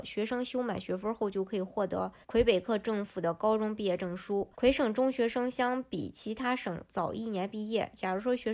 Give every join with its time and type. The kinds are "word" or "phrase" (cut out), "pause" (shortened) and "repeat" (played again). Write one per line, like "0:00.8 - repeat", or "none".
0:02.2 - pause
0:04.5 - pause